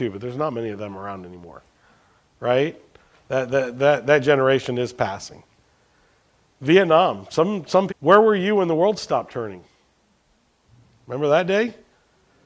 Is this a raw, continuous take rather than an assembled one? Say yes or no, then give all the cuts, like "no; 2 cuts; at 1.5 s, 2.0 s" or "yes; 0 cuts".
no; 1 cut; at 7.9 s